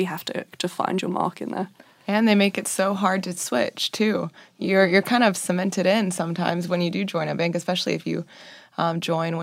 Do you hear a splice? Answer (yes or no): no